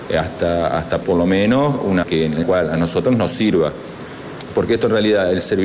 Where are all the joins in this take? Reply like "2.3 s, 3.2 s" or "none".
1.0 s, 2.0 s, 2.4 s